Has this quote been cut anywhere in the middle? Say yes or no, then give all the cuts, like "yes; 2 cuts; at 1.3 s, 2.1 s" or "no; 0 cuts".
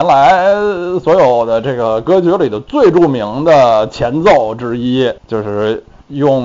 yes; 1 cut; at 5.2 s